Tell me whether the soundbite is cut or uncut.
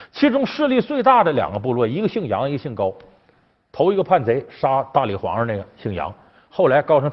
uncut